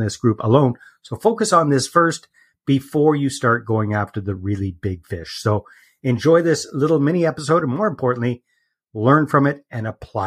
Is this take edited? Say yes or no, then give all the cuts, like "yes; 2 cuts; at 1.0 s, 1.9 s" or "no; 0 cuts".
no; 0 cuts